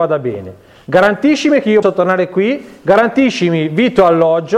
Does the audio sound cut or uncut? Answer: cut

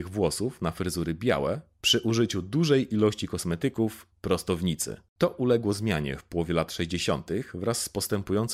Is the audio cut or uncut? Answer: cut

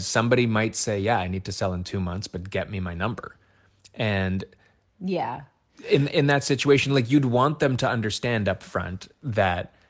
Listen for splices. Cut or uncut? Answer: uncut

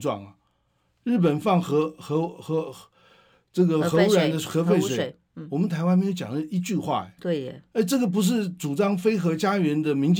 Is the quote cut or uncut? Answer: uncut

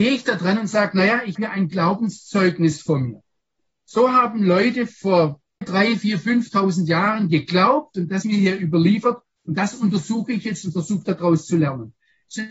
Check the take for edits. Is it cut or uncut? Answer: cut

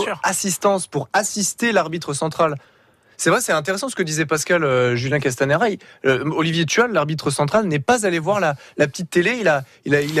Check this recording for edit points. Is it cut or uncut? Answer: uncut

